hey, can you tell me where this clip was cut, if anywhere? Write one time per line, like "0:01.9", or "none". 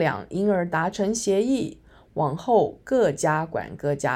none